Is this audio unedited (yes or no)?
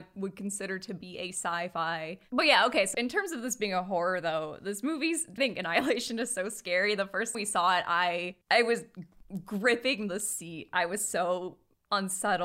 no